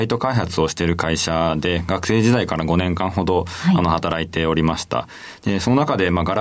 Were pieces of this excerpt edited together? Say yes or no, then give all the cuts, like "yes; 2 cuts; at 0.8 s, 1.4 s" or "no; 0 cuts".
no; 0 cuts